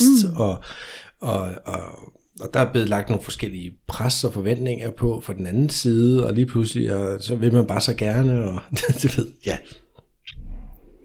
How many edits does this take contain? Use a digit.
0